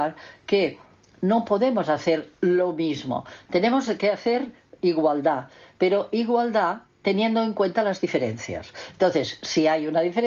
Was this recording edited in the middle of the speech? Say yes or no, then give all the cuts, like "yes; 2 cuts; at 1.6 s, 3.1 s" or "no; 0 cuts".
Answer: no; 0 cuts